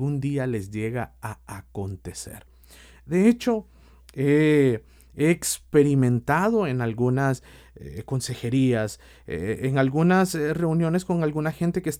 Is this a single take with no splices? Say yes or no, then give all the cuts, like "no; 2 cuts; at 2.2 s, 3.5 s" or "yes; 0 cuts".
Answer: yes; 0 cuts